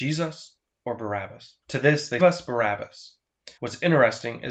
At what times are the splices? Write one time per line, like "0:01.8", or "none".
0:01.6
0:02.2
0:03.6

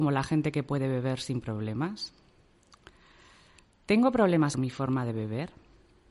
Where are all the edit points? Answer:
0:04.5

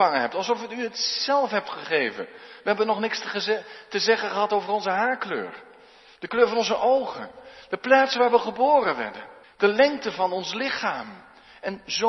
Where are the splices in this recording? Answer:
0:09.4

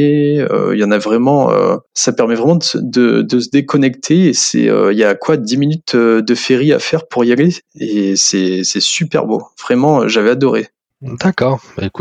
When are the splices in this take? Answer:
0:01.9

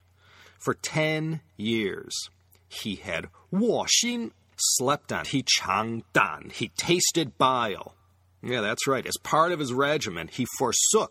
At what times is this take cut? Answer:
0:05.2

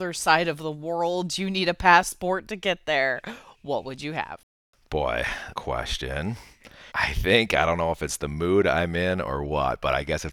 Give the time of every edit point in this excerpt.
0:05.5
0:06.9

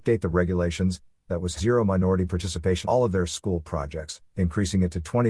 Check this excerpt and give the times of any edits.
0:01.6
0:02.8

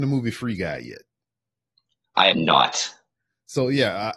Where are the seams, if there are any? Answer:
0:02.3

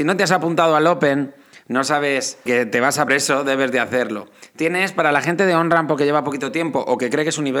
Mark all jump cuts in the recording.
0:02.5
0:03.1

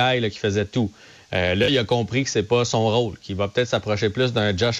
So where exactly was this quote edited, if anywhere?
none

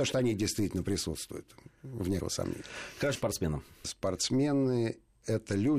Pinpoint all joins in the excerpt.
0:02.2
0:03.2

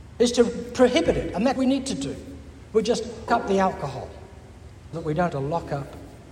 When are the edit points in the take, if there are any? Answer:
0:01.6
0:03.3
0:04.9
0:05.3

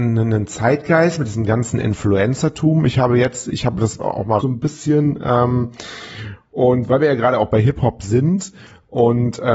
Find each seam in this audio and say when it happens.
0:04.4

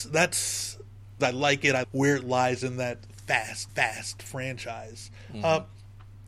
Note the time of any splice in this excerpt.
0:01.2
0:01.8
0:03.7

